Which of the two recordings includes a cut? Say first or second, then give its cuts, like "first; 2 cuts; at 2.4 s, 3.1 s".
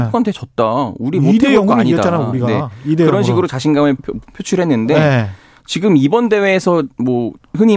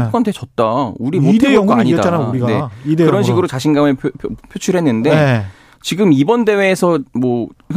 first; 1 cut; at 4.0 s